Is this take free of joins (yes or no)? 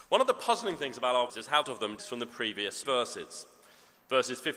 no